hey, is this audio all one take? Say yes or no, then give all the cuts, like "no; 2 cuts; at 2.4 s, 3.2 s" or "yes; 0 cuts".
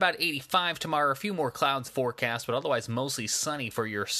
no; 1 cut; at 1.9 s